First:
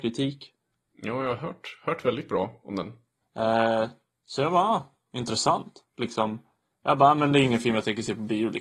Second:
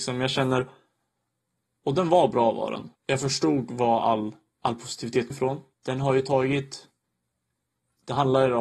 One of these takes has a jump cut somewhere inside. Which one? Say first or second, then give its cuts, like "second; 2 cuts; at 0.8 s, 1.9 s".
second; 3 cuts; at 3.0 s, 5.3 s, 5.7 s